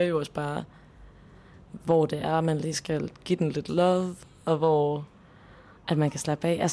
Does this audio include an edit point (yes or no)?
no